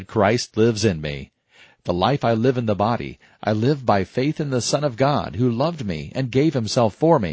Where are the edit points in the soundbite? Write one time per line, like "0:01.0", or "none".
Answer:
none